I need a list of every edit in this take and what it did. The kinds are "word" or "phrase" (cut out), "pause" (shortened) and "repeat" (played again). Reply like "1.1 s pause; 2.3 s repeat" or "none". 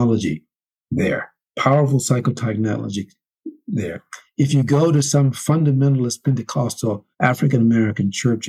1.5 s pause; 7.1 s pause